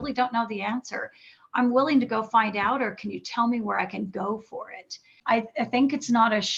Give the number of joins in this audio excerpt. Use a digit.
0